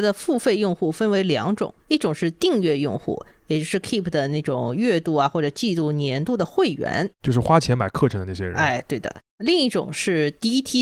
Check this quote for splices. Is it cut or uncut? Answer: cut